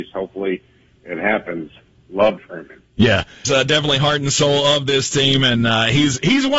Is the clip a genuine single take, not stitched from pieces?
no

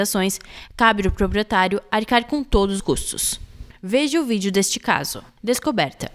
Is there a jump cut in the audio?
yes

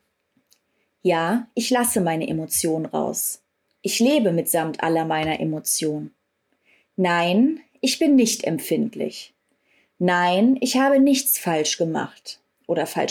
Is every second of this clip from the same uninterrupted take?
yes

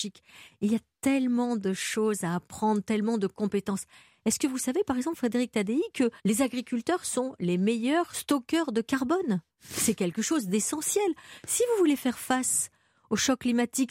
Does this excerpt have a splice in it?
yes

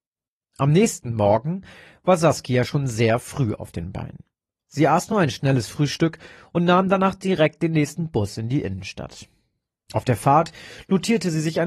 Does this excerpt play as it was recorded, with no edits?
yes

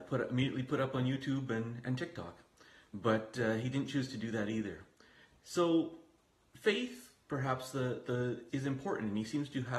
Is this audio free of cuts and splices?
no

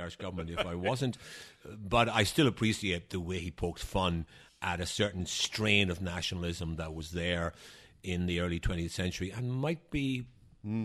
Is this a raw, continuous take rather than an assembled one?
yes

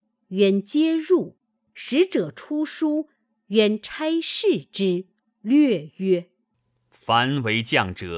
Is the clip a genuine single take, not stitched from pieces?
yes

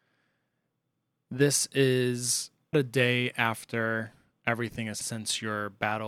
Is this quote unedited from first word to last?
no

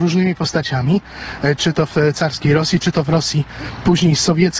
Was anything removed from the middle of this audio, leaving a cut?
no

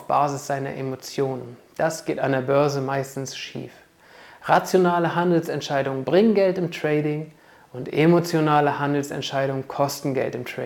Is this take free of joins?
yes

